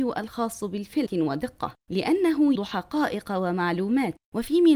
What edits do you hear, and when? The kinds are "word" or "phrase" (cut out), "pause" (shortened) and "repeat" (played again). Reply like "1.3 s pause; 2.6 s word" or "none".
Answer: 1.1 s word; 2.5 s word